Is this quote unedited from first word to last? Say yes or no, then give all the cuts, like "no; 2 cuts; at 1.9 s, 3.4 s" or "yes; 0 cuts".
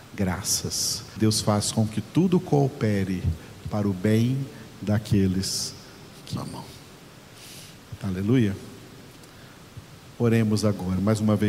no; 2 cuts; at 1.2 s, 6.4 s